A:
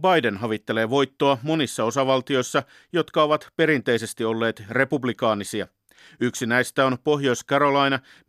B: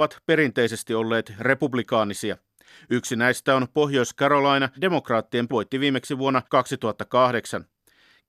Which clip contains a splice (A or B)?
B